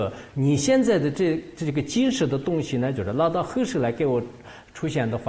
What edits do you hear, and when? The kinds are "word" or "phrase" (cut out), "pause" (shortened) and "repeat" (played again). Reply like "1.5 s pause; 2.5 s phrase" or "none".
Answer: none